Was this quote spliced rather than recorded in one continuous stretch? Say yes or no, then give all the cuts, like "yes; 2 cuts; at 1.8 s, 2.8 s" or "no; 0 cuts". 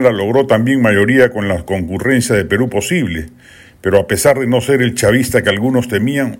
no; 0 cuts